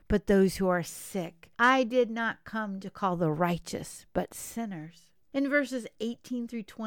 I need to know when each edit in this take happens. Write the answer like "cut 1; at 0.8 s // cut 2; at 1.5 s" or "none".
cut 1; at 1.5 s // cut 2; at 5.2 s